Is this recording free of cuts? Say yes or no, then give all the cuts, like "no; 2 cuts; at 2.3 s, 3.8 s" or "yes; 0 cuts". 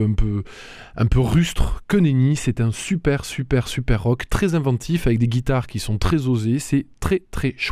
yes; 0 cuts